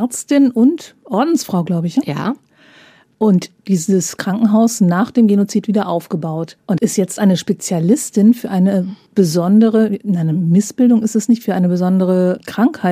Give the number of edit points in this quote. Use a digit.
2